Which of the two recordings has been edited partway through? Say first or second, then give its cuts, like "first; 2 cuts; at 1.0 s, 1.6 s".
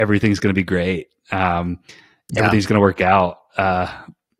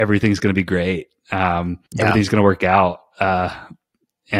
second; 1 cut; at 1.9 s